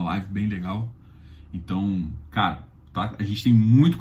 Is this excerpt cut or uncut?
uncut